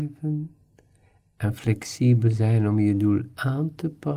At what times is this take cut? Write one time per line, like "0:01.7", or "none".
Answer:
none